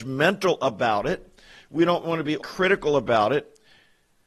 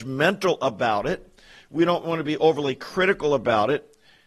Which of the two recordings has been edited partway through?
first; 1 cut; at 2.4 s

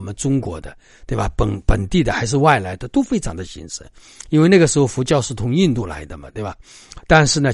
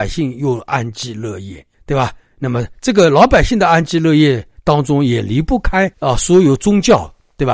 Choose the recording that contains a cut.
second; 2 cuts; at 1.7 s, 5.9 s

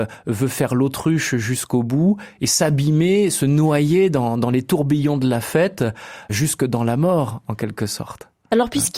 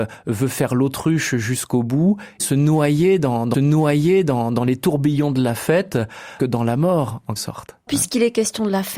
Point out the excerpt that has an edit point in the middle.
second; 5 cuts; at 2.4 s, 3.5 s, 6.4 s, 7.4 s, 7.9 s

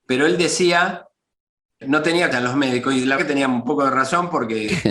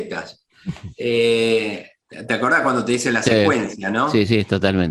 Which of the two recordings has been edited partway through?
first; 3 cuts; at 1.8 s, 2.3 s, 3.2 s

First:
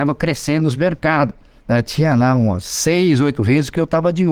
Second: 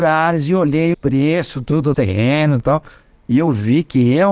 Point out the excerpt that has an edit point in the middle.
second; 3 cuts; at 0.9 s, 1.9 s, 2.6 s

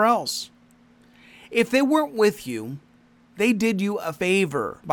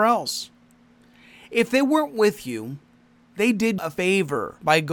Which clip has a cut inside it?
second; 1 cut; at 3.8 s

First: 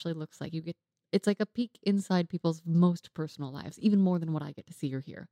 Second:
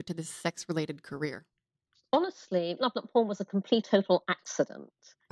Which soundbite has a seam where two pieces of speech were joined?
second; 2 cuts; at 2.8 s, 3.8 s

